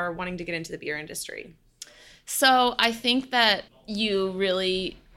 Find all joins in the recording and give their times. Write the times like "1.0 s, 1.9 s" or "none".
3.7 s